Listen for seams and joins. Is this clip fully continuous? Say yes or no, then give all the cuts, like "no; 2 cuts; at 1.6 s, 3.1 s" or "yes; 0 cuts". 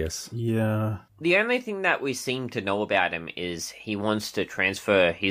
no; 1 cut; at 1.1 s